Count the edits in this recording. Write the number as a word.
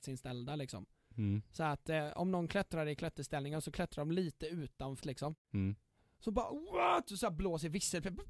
one